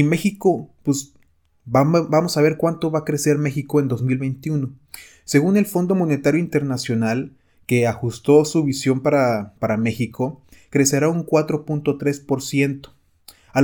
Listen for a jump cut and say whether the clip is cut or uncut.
uncut